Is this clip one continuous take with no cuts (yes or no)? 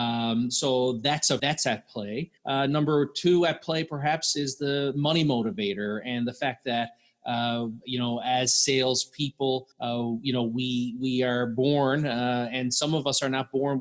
no